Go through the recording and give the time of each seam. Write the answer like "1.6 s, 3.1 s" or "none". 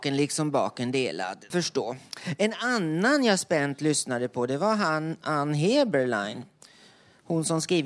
1.5 s